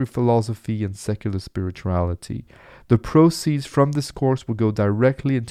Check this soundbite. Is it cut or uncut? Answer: uncut